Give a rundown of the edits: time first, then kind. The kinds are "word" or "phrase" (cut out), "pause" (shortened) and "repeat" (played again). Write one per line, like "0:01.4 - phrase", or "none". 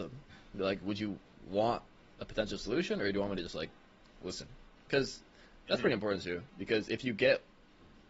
none